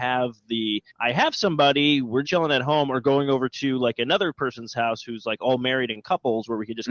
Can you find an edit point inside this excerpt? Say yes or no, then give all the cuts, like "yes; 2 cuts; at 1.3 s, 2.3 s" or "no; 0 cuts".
yes; 2 cuts; at 0.9 s, 2.2 s